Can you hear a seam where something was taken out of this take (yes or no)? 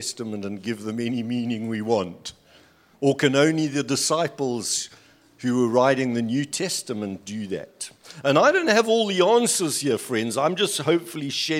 no